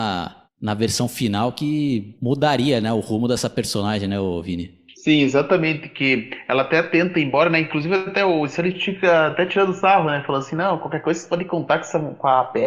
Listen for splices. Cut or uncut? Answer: uncut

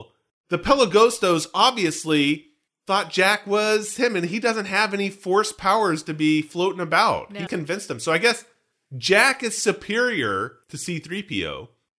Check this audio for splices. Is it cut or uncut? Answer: cut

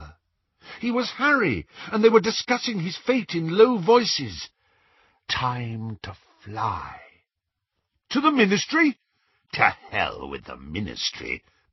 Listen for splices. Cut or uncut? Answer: uncut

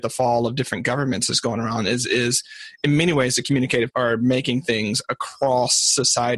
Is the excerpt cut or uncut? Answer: cut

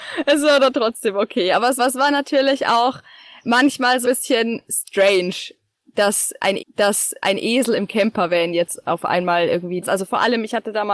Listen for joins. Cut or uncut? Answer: cut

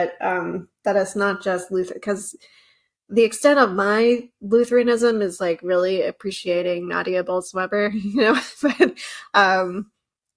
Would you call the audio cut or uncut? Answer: uncut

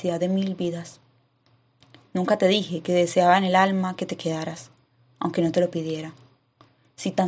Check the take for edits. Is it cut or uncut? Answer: uncut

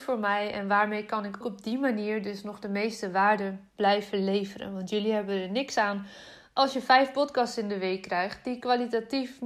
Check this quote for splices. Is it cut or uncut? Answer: cut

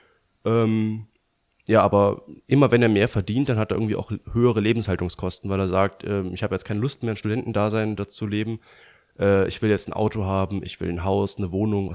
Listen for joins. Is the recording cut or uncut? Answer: uncut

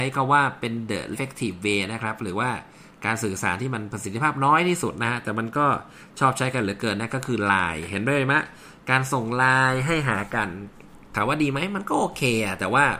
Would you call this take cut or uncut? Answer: cut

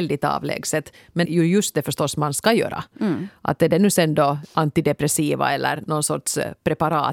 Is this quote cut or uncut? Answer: cut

